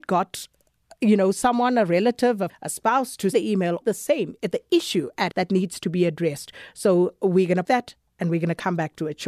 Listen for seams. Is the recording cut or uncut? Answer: cut